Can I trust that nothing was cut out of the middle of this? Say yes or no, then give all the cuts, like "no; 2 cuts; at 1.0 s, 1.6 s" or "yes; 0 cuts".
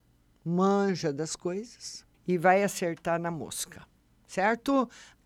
no; 1 cut; at 2.1 s